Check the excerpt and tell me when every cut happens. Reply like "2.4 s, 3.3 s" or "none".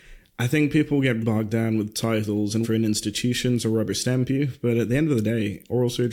1.2 s, 2.6 s